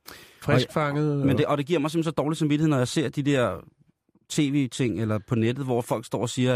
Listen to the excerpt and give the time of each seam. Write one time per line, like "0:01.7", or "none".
none